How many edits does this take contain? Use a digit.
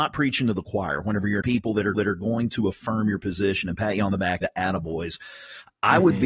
3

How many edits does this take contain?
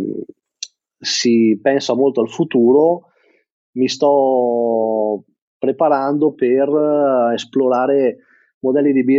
0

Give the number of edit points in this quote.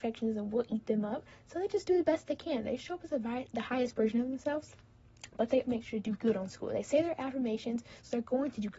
1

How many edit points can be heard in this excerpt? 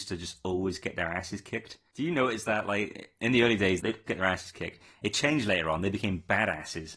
1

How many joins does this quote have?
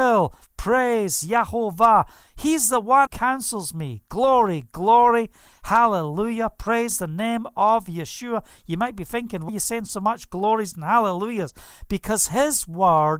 2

